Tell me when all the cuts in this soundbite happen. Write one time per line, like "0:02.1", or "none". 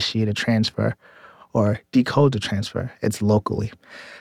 none